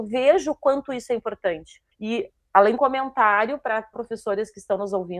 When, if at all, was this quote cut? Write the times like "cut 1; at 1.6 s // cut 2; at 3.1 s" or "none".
cut 1; at 1.9 s // cut 2; at 2.8 s // cut 3; at 3.9 s